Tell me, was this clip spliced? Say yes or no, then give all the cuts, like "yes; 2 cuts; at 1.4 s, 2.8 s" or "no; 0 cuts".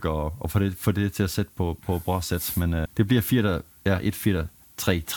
yes; 1 cut; at 2.9 s